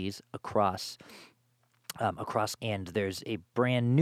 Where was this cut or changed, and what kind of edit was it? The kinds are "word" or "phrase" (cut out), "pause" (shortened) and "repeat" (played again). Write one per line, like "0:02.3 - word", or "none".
0:02.6 - word